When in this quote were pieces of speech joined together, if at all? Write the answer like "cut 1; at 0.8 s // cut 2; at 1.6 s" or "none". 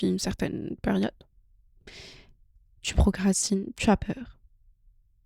none